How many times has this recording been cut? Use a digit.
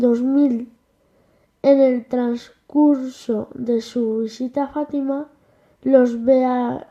0